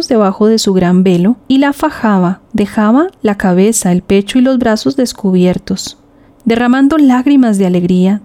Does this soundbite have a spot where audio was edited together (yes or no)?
no